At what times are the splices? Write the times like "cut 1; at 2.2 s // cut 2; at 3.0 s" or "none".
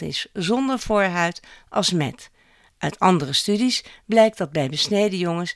none